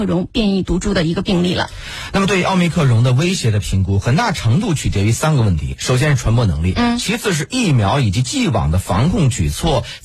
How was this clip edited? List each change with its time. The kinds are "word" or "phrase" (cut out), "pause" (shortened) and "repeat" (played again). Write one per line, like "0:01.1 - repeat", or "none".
none